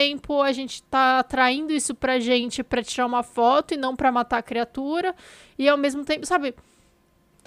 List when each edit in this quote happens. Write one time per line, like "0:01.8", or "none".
none